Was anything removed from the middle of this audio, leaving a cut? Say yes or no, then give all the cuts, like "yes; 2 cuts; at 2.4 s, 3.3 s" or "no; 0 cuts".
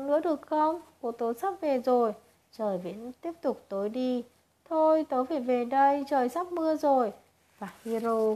no; 0 cuts